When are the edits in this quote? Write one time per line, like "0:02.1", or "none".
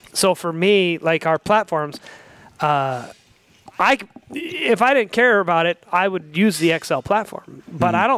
none